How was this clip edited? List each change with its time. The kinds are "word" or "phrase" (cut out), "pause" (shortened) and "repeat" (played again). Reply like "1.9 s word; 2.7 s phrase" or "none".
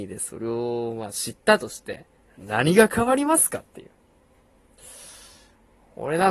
2.2 s pause